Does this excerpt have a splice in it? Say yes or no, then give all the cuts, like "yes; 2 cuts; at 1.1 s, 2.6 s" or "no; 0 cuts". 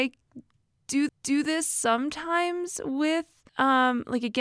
yes; 2 cuts; at 1.1 s, 3.5 s